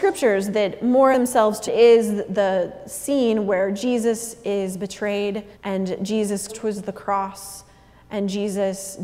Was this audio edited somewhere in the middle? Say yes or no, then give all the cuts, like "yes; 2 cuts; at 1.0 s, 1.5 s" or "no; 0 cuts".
yes; 4 cuts; at 1.1 s, 1.7 s, 5.5 s, 6.5 s